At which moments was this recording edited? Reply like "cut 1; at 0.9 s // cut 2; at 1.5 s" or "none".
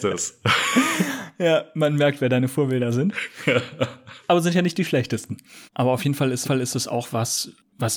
cut 1; at 5.7 s // cut 2; at 6.4 s